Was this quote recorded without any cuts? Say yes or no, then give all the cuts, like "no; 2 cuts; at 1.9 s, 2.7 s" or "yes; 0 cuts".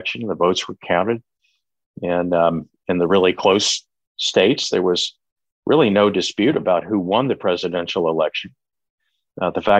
yes; 0 cuts